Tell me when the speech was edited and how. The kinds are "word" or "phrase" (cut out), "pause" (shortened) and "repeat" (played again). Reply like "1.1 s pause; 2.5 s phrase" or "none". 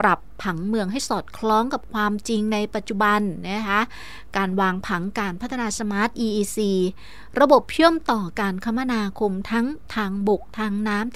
none